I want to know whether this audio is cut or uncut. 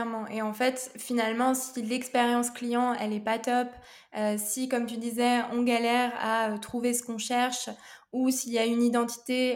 uncut